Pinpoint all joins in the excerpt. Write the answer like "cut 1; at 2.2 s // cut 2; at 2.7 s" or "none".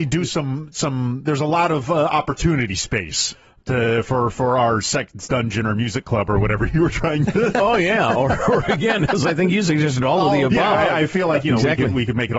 none